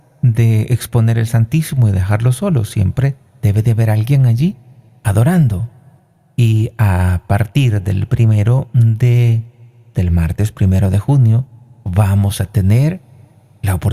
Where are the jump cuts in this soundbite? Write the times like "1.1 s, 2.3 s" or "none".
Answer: 6.0 s, 9.9 s